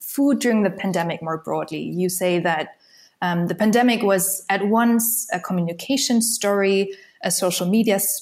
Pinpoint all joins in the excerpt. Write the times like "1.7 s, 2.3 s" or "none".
none